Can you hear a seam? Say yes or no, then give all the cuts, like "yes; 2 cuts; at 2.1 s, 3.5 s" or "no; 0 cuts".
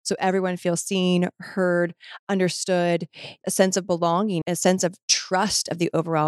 yes; 2 cuts; at 3.4 s, 4.4 s